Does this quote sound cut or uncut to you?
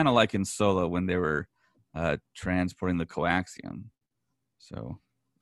uncut